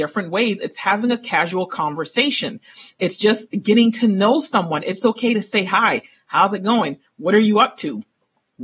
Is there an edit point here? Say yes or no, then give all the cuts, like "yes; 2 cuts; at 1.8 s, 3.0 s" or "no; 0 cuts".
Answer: no; 0 cuts